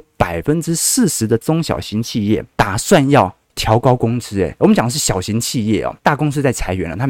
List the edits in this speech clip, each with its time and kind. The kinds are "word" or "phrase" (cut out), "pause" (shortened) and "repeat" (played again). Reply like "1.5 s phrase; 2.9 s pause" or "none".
2.5 s pause; 3.4 s pause; 6.0 s pause